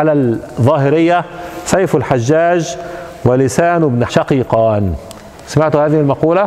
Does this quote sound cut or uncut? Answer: cut